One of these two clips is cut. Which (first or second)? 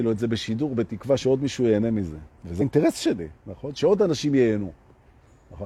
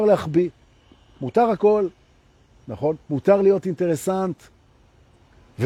first